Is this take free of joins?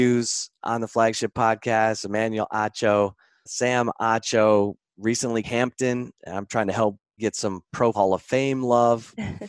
no; 5 cuts; at 3.5 s, 5.4 s, 6.2 s, 7.2 s, 7.9 s

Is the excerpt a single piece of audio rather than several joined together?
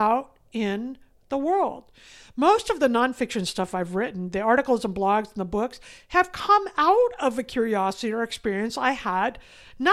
yes; 0 cuts

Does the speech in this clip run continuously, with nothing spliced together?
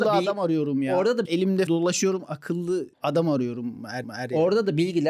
no; 4 cuts; at 1.2 s, 1.7 s, 2.9 s, 4.0 s

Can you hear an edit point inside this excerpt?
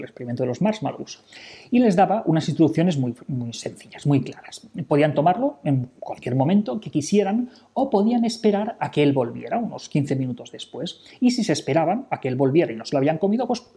no; 0 cuts

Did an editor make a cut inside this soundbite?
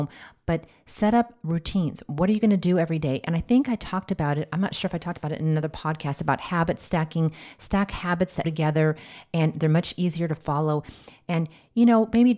yes; 1 cut; at 8.4 s

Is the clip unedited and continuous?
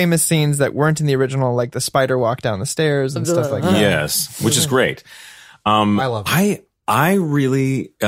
yes; 0 cuts

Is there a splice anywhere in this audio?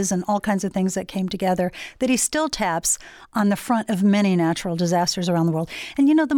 no; 0 cuts

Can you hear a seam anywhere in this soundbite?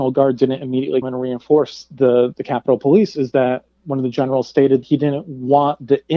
yes; 2 cuts; at 1.0 s, 4.8 s

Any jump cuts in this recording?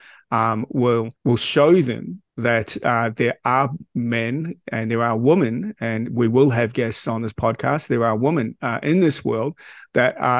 yes; 2 cuts; at 1.2 s, 2.3 s

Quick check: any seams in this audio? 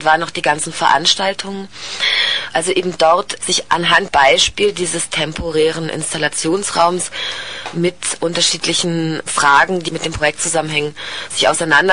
yes; 4 cuts; at 3.4 s, 4.1 s, 9.3 s, 9.9 s

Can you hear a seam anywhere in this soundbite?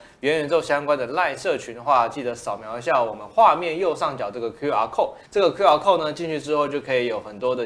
yes; 1 cut; at 5.2 s

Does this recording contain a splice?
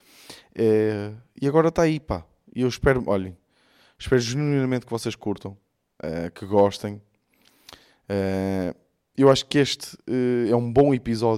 no; 0 cuts

